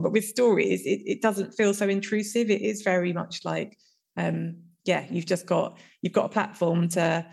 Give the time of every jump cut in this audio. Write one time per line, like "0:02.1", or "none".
none